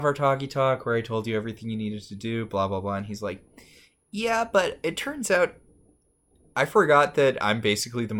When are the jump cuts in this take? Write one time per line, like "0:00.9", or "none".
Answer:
none